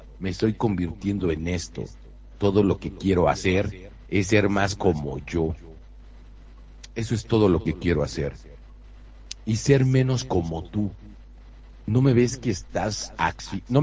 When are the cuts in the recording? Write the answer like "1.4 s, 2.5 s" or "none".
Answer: none